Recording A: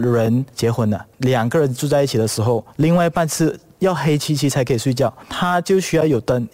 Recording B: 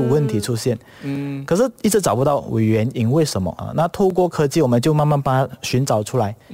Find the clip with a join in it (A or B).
A